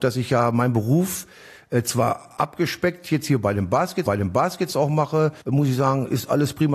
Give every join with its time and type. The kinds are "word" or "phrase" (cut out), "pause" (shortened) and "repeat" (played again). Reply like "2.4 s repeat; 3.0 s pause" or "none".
4.1 s repeat; 5.4 s pause

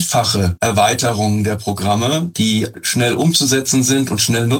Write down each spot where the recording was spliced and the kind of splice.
none

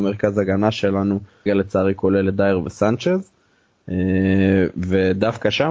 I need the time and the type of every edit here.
1.5 s word

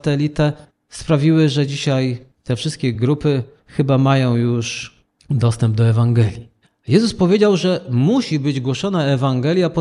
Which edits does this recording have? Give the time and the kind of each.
none

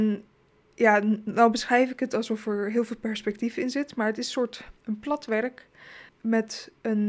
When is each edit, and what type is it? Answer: 4.8 s pause; 6.1 s word

